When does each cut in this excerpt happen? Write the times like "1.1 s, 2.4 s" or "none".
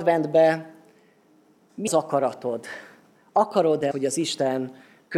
1.9 s, 3.9 s